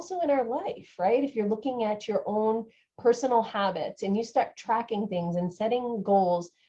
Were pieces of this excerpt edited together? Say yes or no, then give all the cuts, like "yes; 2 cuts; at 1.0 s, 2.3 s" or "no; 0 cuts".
no; 0 cuts